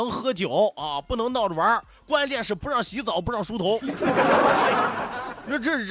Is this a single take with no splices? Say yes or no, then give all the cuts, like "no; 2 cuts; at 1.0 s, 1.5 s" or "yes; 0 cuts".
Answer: yes; 0 cuts